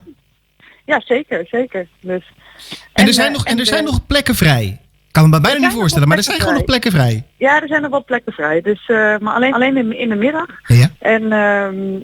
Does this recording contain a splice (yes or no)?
yes